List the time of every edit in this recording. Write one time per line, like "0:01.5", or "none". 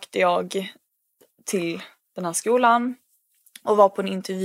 none